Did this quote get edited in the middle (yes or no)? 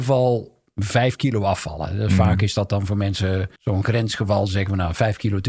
yes